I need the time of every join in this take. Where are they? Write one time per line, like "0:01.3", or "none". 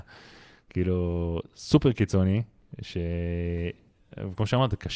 none